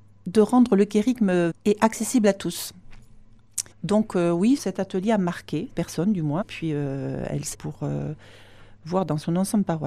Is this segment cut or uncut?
cut